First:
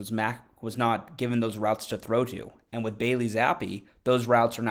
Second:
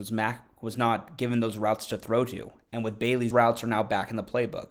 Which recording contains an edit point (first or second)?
second